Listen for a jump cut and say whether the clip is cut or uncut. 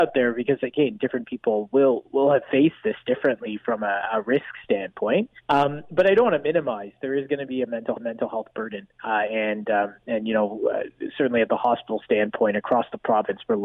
cut